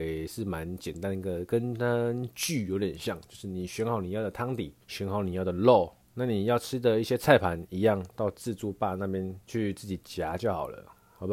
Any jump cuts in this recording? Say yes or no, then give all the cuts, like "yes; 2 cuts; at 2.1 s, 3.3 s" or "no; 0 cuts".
yes; 3 cuts; at 4.8 s, 6.0 s, 9.4 s